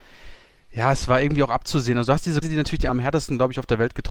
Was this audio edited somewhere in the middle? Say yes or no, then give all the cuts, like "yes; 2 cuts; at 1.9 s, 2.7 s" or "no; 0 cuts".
yes; 2 cuts; at 2.4 s, 2.9 s